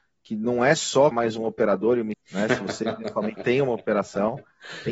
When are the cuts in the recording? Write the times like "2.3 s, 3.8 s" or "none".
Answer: 1.1 s, 2.1 s, 3.3 s